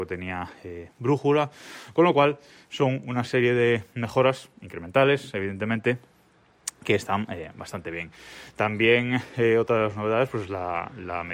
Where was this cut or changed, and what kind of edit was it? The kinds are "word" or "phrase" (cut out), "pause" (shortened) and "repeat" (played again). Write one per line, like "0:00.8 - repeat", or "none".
none